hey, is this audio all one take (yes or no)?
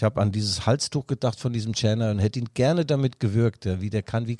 yes